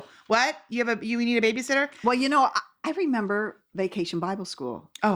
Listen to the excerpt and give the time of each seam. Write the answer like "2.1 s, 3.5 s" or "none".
none